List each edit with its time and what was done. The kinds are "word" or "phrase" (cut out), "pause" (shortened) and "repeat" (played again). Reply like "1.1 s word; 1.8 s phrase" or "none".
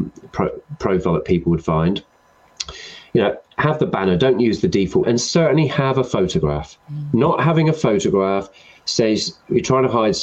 5.0 s phrase; 6.8 s pause